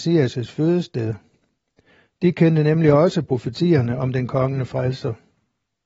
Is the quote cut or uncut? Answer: uncut